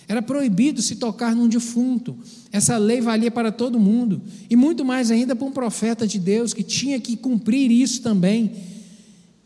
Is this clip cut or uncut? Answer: uncut